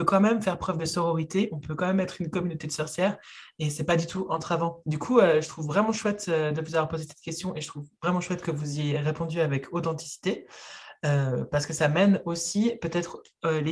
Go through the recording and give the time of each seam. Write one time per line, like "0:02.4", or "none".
none